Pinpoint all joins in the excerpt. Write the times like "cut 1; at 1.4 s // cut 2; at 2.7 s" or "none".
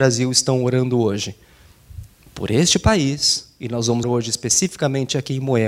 cut 1; at 2.3 s // cut 2; at 4.0 s